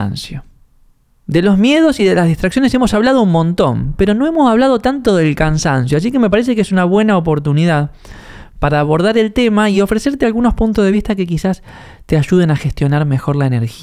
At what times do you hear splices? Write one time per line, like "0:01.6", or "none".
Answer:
none